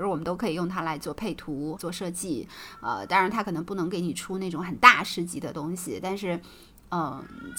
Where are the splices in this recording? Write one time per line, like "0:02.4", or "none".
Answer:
0:01.8